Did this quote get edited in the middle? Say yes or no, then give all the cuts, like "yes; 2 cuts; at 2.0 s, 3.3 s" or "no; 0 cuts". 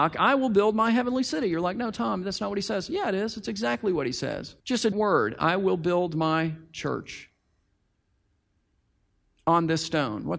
yes; 2 cuts; at 4.6 s, 4.9 s